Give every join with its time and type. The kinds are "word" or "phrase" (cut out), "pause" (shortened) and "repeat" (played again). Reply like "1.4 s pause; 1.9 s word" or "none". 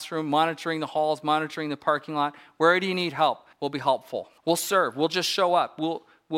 3.5 s pause; 4.4 s pause